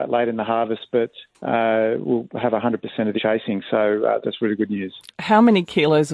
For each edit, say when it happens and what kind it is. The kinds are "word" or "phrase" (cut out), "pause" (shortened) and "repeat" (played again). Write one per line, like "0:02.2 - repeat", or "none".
0:01.3 - pause
0:03.2 - phrase
0:04.2 - word